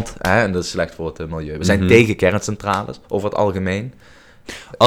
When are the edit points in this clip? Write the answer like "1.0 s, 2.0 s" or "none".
3.0 s